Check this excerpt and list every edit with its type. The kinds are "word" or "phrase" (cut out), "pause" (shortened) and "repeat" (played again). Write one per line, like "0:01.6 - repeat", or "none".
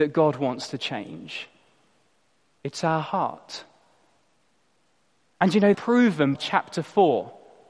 0:05.7 - word
0:06.4 - word